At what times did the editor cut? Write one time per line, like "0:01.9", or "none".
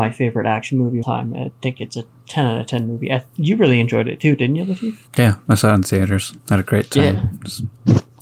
0:01.0
0:05.1
0:06.4